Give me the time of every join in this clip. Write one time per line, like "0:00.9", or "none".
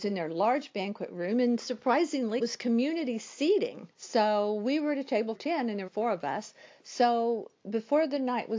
0:02.4
0:03.9
0:05.3
0:05.9